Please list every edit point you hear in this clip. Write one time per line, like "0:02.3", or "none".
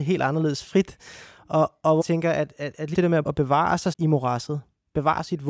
0:02.0
0:02.9
0:03.3
0:03.9